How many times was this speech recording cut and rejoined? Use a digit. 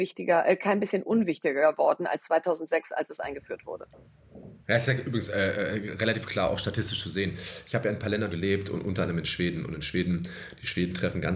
2